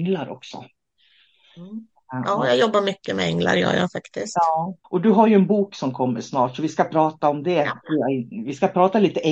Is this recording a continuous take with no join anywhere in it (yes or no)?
no